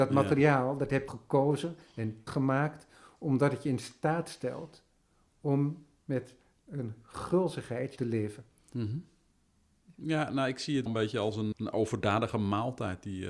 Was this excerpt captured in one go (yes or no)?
no